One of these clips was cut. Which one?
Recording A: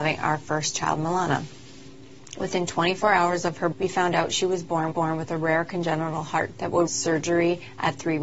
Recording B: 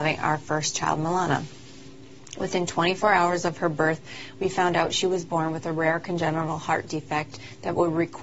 A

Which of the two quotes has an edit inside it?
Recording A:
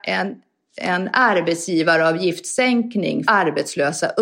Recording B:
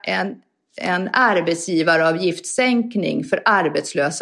A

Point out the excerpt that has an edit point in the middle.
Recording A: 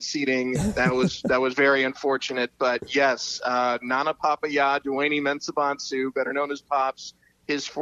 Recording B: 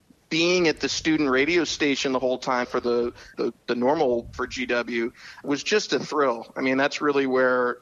B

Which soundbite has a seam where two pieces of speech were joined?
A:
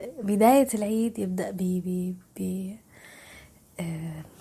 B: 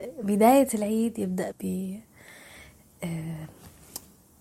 B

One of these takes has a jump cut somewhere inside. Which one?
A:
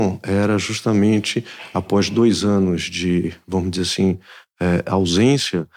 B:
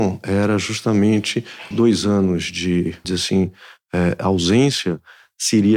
B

